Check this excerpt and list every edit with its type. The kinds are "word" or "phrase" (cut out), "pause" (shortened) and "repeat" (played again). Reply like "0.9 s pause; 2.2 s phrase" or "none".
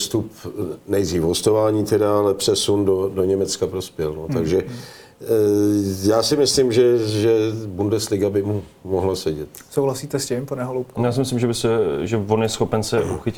none